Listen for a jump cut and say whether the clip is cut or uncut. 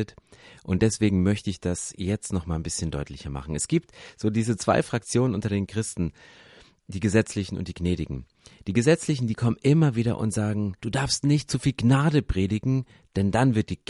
cut